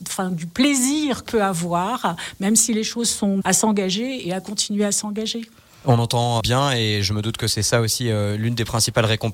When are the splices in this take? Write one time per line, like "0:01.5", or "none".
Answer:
0:01.3
0:03.4
0:06.4